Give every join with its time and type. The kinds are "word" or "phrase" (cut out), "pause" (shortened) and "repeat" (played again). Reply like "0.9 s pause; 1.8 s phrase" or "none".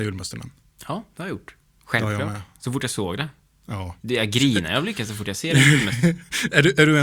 none